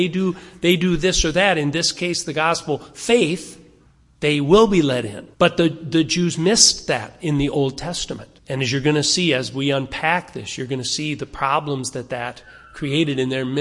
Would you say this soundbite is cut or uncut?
cut